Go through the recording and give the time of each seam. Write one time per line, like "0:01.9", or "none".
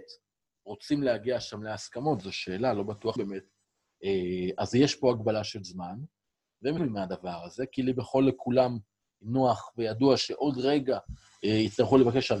0:03.2
0:06.8